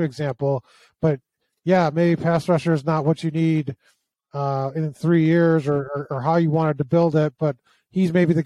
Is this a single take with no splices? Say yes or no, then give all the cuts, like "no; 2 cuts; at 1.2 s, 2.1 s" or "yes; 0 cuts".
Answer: yes; 0 cuts